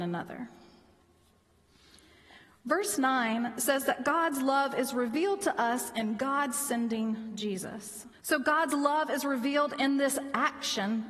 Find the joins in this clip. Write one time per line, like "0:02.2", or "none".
0:08.1